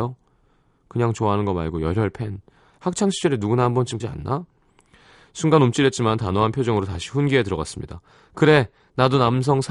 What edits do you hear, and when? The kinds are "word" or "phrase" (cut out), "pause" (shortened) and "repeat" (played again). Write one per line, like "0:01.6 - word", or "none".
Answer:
0:04.0 - word